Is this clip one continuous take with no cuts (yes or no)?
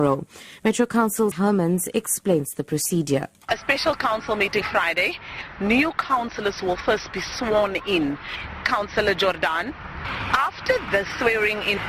no